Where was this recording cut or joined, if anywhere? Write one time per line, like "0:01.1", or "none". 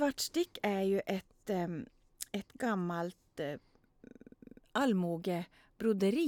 none